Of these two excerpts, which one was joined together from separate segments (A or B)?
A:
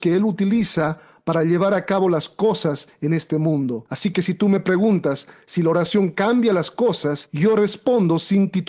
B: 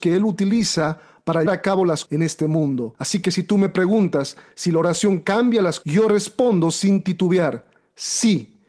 B